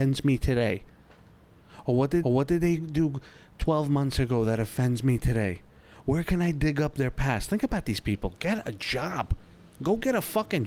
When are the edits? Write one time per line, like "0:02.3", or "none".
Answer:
0:02.2